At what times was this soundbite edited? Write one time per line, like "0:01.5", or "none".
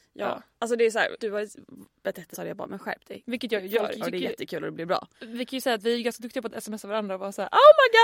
0:01.2
0:02.3
0:04.0
0:05.1